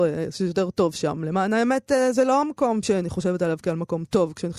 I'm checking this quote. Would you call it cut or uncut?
uncut